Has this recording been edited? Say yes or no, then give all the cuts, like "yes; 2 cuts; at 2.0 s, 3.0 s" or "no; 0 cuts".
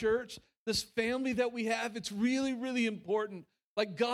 no; 0 cuts